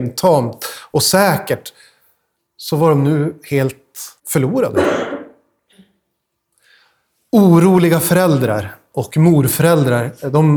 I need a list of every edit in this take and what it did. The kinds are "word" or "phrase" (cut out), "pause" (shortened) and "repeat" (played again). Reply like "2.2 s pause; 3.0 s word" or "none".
4.2 s pause